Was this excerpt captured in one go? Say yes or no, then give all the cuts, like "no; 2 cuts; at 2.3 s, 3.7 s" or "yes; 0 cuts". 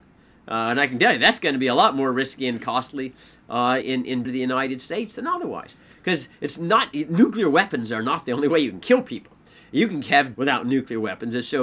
no; 3 cuts; at 3.8 s, 4.2 s, 10.3 s